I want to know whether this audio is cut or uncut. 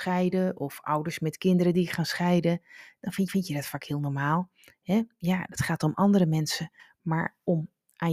cut